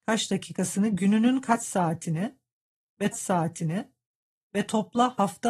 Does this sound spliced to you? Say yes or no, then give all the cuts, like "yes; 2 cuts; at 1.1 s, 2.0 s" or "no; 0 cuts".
yes; 1 cut; at 3.1 s